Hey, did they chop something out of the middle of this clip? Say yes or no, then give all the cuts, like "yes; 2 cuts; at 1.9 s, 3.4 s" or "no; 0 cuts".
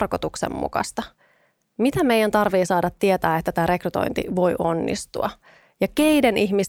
no; 0 cuts